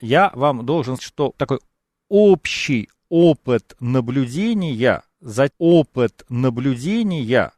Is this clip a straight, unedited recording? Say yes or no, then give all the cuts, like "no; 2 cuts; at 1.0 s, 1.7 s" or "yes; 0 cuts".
no; 3 cuts; at 1.0 s, 1.4 s, 5.5 s